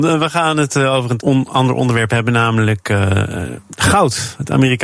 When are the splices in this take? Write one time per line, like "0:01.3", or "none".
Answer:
0:01.2